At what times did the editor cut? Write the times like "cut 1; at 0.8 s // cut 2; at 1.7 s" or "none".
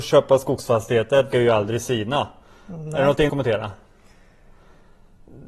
cut 1; at 1.3 s // cut 2; at 3.3 s